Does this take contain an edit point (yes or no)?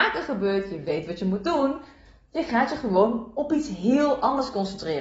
no